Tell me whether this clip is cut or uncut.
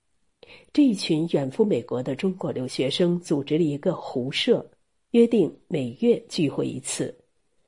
uncut